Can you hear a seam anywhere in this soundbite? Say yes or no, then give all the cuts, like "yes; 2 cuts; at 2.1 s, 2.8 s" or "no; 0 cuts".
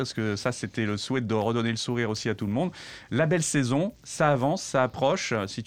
no; 0 cuts